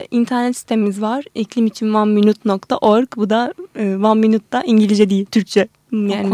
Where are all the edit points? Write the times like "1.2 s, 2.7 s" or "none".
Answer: none

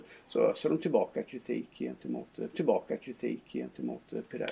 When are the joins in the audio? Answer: 2.5 s

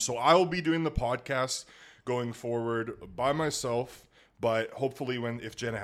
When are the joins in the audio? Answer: none

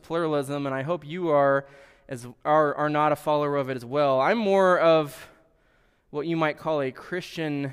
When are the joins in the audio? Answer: none

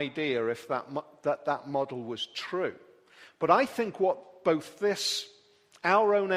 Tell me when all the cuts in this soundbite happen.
none

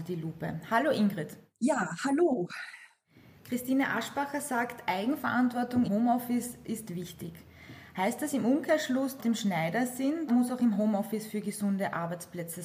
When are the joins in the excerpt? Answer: 5.8 s, 9.2 s, 10.3 s

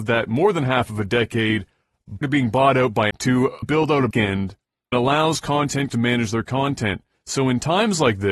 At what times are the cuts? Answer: 2.2 s, 3.1 s, 3.6 s, 4.1 s, 4.9 s, 5.9 s

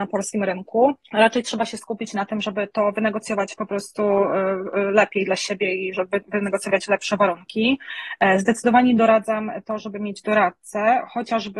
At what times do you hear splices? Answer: 1.0 s

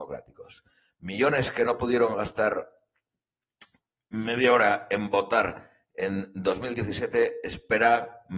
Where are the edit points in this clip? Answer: none

